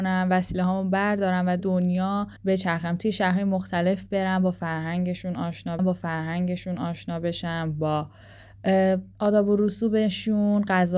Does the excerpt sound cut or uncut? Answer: cut